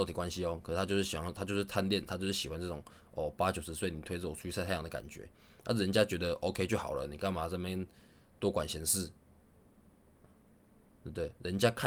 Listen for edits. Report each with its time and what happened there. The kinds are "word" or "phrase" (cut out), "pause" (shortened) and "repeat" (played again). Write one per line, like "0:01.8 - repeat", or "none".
none